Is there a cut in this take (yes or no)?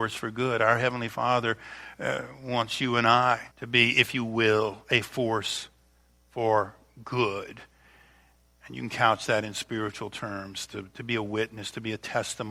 yes